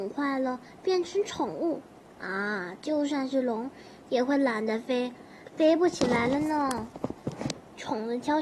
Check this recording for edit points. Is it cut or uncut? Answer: uncut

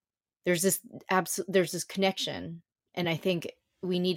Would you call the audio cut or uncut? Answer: uncut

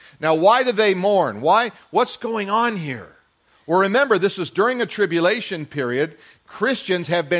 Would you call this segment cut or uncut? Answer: uncut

